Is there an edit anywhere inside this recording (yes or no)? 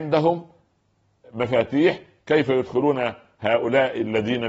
no